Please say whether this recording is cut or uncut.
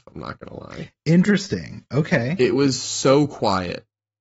uncut